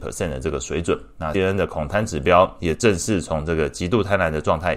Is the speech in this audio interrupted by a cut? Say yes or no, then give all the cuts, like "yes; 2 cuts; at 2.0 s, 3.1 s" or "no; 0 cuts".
yes; 1 cut; at 1.3 s